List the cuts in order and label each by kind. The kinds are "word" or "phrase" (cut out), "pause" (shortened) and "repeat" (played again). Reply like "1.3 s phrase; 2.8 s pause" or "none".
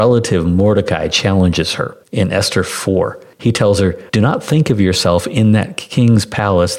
2.0 s pause; 3.3 s pause; 4.1 s pause